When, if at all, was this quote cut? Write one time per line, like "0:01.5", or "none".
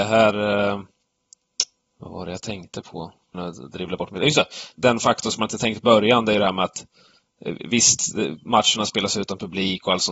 0:01.8
0:03.3
0:04.7
0:05.8